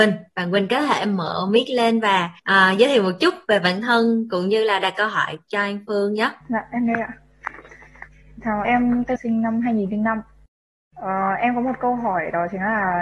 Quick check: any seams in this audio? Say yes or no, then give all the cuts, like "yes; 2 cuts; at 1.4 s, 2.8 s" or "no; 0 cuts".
yes; 4 cuts; at 2.4 s, 6.4 s, 8.6 s, 9.2 s